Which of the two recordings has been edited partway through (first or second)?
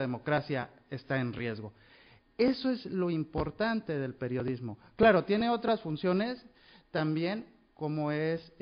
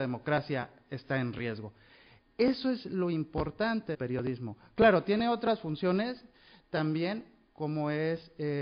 second